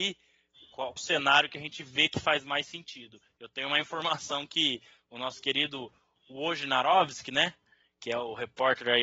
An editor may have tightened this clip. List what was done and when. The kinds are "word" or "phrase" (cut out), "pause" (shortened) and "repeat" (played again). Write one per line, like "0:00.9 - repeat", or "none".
0:01.0 - word